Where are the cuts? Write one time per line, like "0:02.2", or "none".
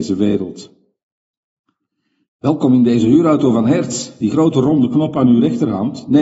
none